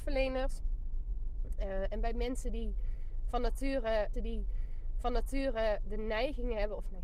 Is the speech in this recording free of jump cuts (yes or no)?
no